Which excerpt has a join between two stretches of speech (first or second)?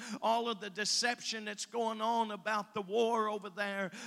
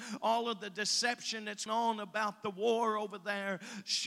second